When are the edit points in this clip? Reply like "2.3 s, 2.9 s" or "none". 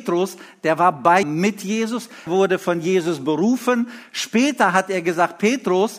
1.2 s, 2.3 s